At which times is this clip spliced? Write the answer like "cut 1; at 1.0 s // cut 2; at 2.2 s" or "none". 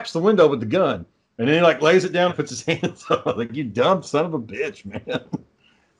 cut 1; at 2.3 s